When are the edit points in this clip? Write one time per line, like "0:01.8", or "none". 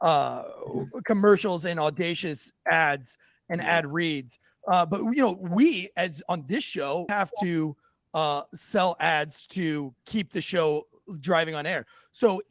0:07.1